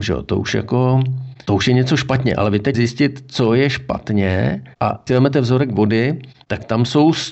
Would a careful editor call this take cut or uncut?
cut